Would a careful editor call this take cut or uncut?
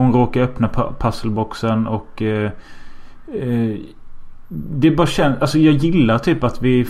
uncut